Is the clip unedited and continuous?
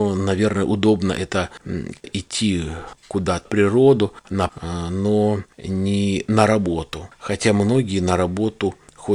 no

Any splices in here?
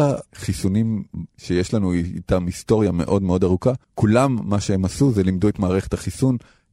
yes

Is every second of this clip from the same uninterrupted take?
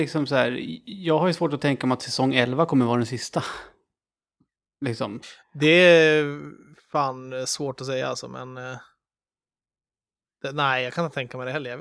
yes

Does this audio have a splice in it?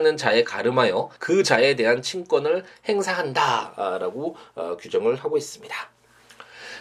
yes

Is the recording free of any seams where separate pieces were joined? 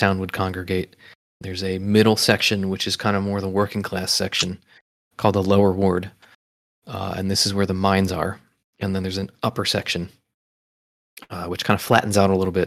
yes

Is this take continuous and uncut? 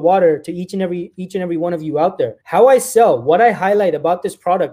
no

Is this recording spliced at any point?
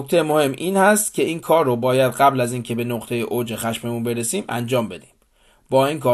no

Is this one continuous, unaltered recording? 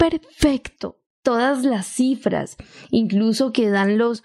no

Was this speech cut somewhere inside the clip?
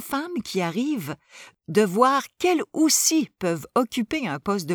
no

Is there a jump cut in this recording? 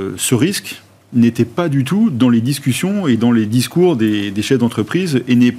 no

